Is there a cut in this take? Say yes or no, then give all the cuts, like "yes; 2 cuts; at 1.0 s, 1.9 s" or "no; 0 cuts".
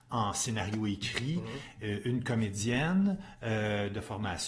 no; 0 cuts